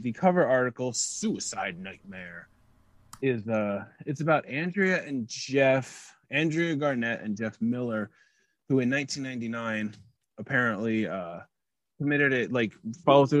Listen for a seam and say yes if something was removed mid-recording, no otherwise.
no